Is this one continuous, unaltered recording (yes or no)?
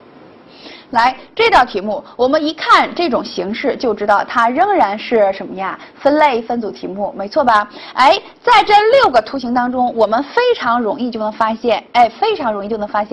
yes